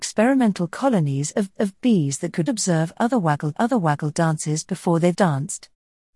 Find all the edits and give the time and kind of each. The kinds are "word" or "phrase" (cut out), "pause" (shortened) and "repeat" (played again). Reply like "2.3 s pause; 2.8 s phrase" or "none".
1.6 s repeat; 2.5 s word; 3.5 s repeat; 5.1 s word